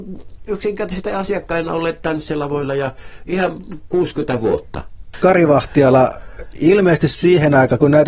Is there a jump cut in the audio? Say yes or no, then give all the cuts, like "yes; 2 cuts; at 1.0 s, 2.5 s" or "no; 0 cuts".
no; 0 cuts